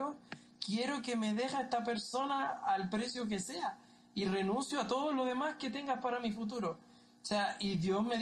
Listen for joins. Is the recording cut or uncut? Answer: uncut